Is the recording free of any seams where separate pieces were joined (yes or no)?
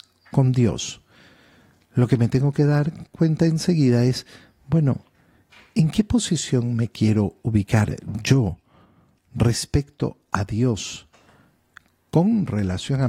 yes